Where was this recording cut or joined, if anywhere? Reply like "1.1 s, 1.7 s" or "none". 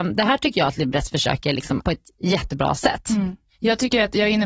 1.8 s